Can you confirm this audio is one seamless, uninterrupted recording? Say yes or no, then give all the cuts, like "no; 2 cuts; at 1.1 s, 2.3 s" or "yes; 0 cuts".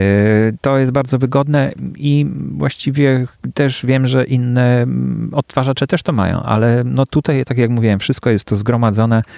yes; 0 cuts